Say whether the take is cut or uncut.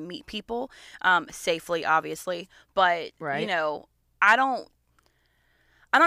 uncut